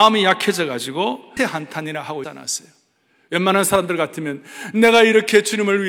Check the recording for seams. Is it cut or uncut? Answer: cut